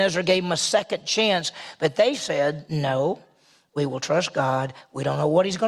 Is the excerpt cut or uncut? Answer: uncut